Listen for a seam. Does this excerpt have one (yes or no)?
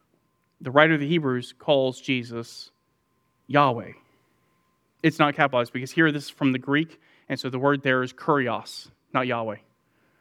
no